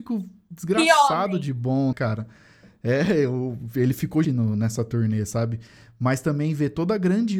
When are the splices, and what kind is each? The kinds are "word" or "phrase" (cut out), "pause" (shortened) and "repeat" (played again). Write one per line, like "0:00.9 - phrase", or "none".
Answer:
0:01.9 - word
0:04.2 - word

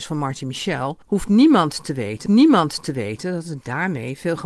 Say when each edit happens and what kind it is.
0:01.0 - pause
0:02.3 - repeat

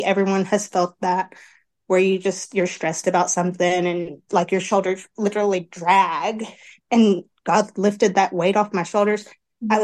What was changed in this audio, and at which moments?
none

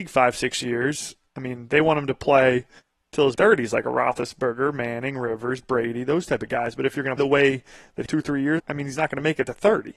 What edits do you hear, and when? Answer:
0:03.4 - phrase
0:07.2 - word
0:08.1 - phrase
0:08.6 - word

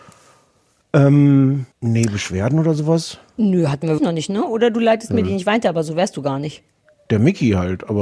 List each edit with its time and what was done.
0:01.7 - pause
0:04.0 - word

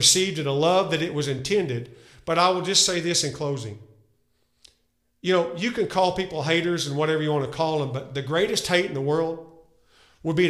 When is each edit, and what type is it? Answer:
none

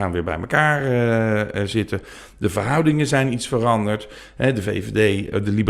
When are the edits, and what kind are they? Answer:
none

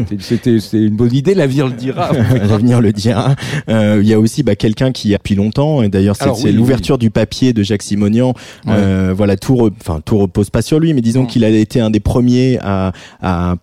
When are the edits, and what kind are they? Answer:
0:05.2 - phrase

